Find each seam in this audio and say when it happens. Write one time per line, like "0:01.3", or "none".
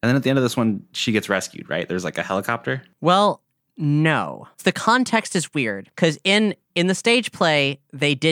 0:04.5
0:05.9
0:06.6